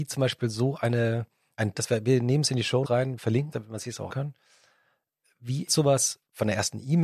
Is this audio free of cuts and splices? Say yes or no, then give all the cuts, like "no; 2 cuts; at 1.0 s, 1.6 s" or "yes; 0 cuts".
no; 5 cuts; at 1.7 s, 2.8 s, 3.5 s, 4.1 s, 5.7 s